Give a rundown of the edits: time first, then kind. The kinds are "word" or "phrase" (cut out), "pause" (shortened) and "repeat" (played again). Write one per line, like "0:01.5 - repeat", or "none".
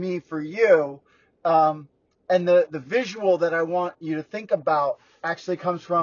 none